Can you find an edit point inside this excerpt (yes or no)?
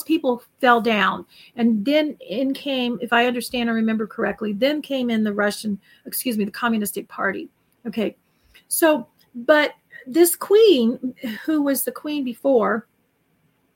no